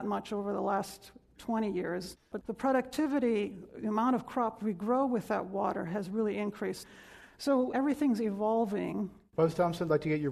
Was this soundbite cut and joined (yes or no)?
no